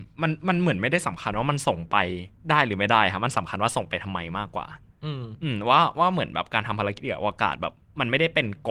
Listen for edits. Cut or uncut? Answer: cut